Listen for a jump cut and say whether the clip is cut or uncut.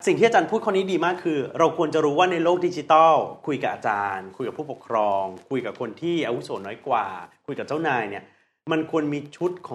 uncut